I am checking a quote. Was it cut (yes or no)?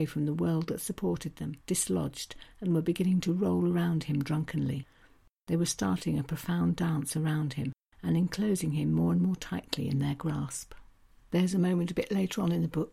yes